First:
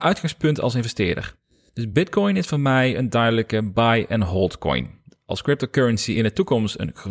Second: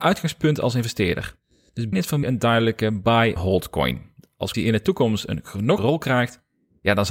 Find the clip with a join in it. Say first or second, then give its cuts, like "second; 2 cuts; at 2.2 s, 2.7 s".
second; 5 cuts; at 1.9 s, 2.2 s, 3.4 s, 4.5 s, 5.8 s